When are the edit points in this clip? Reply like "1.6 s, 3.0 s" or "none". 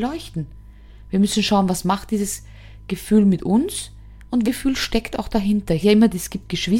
4.4 s, 5.8 s